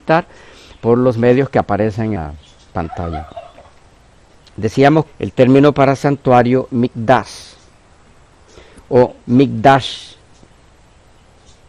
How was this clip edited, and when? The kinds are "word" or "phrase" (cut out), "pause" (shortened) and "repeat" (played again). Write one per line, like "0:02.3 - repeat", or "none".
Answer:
0:02.2 - word
0:05.1 - word
0:06.7 - word
0:09.2 - pause

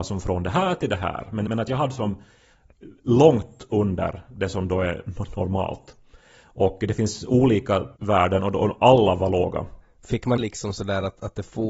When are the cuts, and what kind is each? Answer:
0:01.5 - word
0:08.0 - pause
0:10.4 - phrase

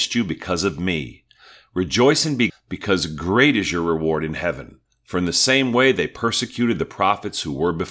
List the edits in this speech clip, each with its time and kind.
0:02.5 - word

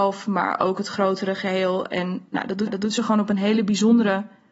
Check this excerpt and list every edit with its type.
0:02.7 - repeat

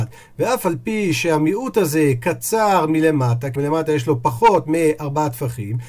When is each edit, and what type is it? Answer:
0:03.6 - word

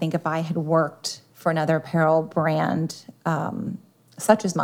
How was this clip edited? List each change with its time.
0:01.3 - pause

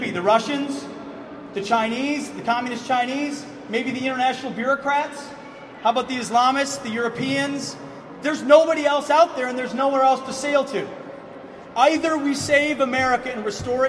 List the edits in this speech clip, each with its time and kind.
none

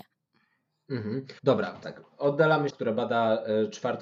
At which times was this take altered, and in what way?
0:01.4 - pause
0:01.8 - phrase
0:02.7 - phrase

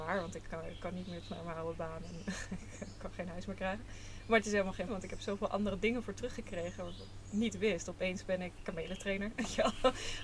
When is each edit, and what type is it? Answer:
0:01.2 - word
0:04.9 - word
0:08.6 - word

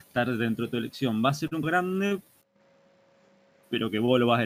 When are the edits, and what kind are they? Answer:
0:01.6 - word

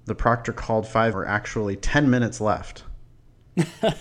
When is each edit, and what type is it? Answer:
0:01.1 - phrase

